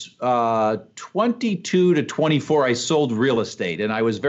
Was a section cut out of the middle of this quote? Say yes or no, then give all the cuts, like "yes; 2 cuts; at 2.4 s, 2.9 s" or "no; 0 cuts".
no; 0 cuts